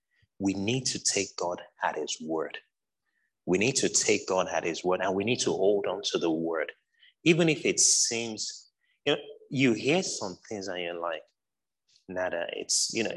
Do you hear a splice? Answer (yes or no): no